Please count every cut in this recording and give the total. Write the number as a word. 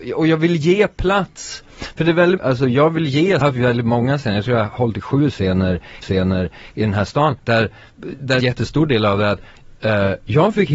five